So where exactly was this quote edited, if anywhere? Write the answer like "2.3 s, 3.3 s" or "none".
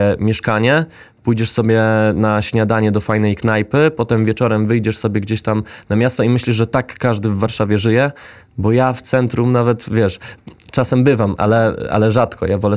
none